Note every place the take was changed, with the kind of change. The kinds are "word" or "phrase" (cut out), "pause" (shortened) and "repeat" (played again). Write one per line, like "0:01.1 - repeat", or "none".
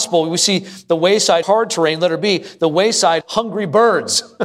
0:01.4 - word
0:03.2 - word